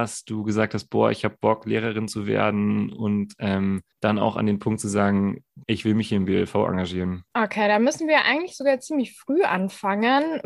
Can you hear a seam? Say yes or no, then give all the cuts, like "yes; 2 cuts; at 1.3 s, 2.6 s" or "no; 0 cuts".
yes; 3 cuts; at 3.9 s, 5.6 s, 7.3 s